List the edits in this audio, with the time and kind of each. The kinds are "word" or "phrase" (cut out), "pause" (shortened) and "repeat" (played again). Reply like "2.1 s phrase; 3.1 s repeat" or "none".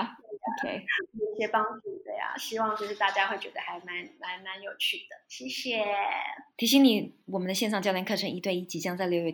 none

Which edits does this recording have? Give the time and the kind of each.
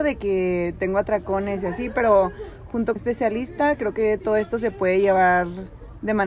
3.0 s phrase

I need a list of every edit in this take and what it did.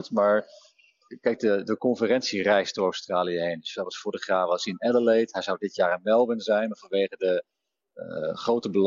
none

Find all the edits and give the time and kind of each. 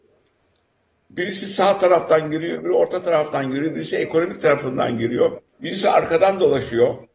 5.5 s pause

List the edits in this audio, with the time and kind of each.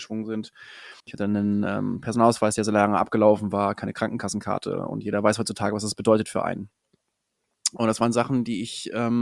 1.0 s pause

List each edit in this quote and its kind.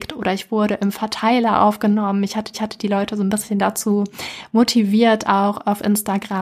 2.5 s repeat

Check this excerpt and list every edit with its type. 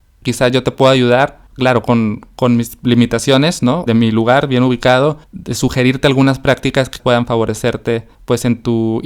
1.5 s pause; 3.9 s phrase; 5.2 s pause; 7.0 s word; 8.1 s pause

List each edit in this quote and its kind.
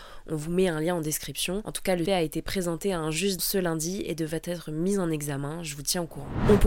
2.1 s word; 3.4 s word

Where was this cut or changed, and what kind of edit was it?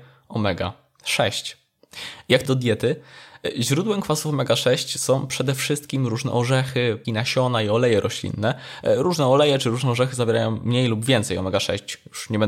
2.5 s word; 7.0 s word

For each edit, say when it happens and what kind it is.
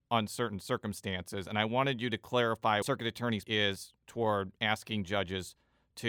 2.8 s phrase; 3.4 s word

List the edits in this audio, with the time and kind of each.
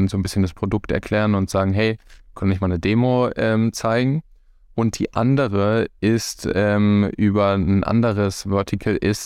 none

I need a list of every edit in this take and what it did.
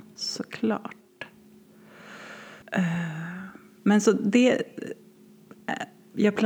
2.6 s pause

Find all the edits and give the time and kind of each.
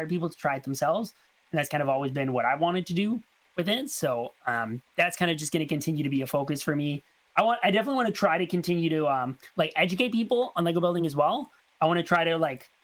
none

